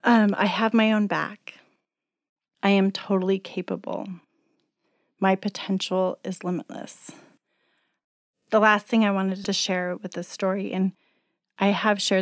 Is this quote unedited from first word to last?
yes; 0 cuts

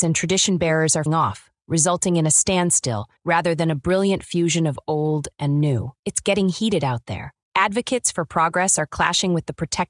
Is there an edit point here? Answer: yes; 4 cuts; at 1.1 s, 3.2 s, 6.0 s, 7.4 s

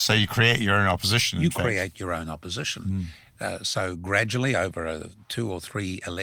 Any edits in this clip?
no; 0 cuts

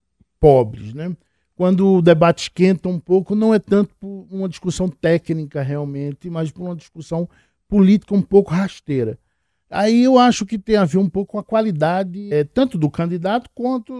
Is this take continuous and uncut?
no; 1 cut; at 12.3 s

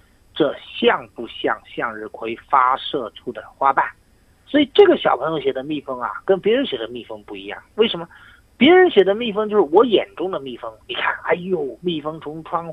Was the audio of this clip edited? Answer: no; 0 cuts

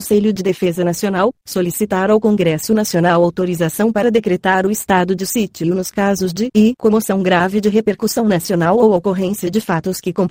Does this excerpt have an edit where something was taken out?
no; 0 cuts

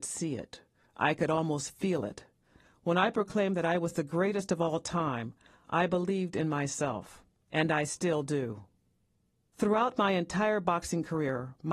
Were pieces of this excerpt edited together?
no; 0 cuts

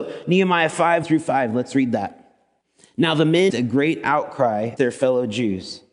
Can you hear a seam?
yes; 4 cuts; at 1.0 s, 2.6 s, 3.5 s, 4.8 s

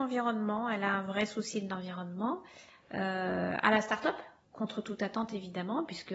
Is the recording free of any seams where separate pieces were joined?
no; 1 cut; at 4.4 s

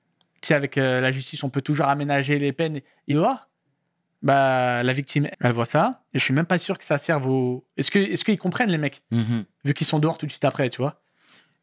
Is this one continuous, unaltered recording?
no; 3 cuts; at 3.1 s, 5.3 s, 6.1 s

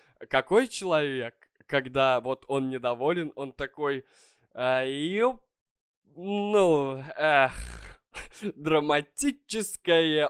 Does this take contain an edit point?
no; 0 cuts

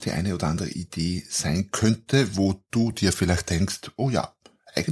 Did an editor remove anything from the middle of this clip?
no; 0 cuts

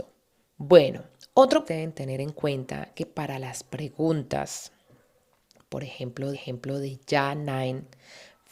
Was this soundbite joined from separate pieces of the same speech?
yes; 3 cuts; at 1.7 s, 2.9 s, 6.3 s

